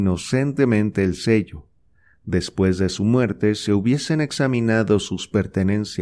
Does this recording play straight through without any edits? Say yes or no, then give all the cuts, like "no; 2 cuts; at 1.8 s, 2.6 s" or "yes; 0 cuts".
yes; 0 cuts